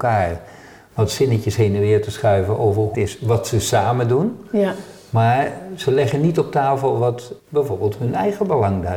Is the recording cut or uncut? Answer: cut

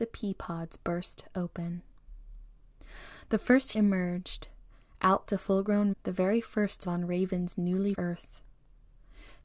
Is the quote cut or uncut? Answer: cut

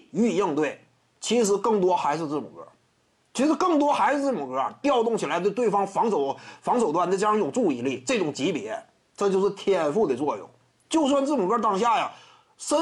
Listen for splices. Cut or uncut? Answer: uncut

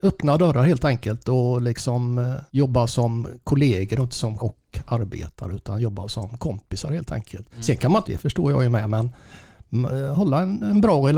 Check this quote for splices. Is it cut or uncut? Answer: cut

